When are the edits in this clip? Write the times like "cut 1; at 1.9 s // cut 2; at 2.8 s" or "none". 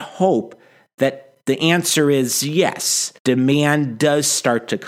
cut 1; at 3.2 s